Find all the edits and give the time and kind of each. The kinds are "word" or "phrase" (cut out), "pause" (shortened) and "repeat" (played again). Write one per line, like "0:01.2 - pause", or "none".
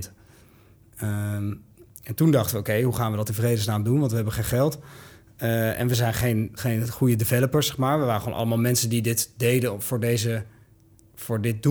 0:06.6 - word